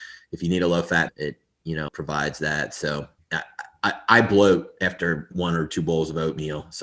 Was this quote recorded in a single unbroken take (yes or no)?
no